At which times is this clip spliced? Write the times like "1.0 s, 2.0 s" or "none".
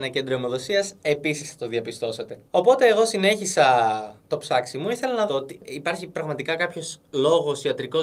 2.5 s, 4.3 s, 5.3 s